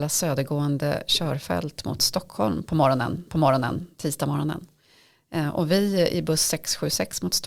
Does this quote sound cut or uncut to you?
cut